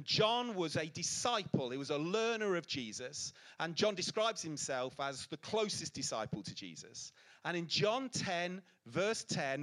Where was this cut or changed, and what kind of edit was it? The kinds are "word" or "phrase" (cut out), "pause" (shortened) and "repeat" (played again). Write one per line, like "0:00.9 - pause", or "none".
none